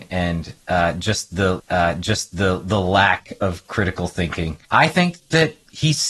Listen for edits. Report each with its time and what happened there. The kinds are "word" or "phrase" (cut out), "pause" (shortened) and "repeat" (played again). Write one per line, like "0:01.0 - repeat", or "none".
0:01.6 - repeat
0:04.6 - pause